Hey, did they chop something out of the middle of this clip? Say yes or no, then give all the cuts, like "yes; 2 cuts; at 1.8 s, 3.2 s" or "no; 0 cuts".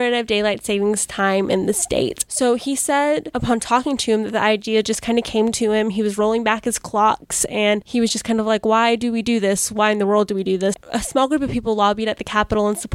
no; 0 cuts